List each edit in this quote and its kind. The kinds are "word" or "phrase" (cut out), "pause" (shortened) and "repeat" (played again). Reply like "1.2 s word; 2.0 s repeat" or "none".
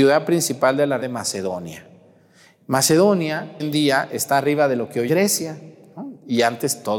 1.0 s word; 3.6 s word; 5.1 s word